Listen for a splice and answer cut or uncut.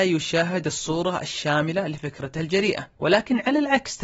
cut